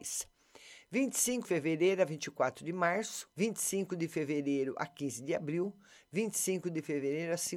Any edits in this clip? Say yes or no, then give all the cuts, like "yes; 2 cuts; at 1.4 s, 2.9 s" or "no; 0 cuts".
yes; 2 cuts; at 1.4 s, 3.3 s